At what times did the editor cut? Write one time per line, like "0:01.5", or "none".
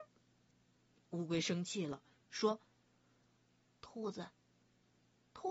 none